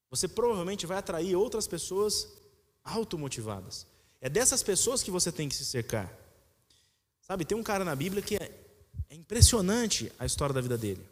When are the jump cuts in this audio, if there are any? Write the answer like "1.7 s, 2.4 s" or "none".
none

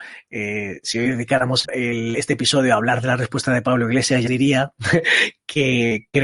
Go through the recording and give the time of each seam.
1.6 s, 4.3 s

